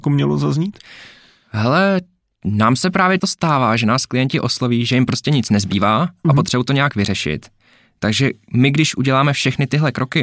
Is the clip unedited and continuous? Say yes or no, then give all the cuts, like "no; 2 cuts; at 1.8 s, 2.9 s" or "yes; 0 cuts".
no; 1 cut; at 3.2 s